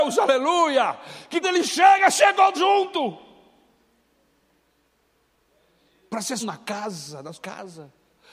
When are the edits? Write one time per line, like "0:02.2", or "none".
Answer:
0:01.4
0:02.5
0:06.4
0:07.3